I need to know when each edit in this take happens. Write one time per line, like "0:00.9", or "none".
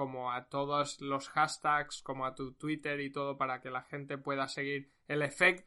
none